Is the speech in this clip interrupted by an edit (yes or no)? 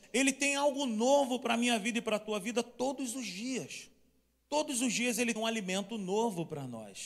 yes